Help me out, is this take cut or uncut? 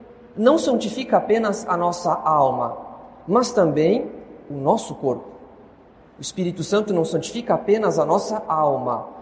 uncut